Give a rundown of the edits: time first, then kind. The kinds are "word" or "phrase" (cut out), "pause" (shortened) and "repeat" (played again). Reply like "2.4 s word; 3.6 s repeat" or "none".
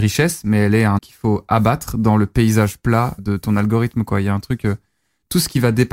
1.0 s word; 3.2 s word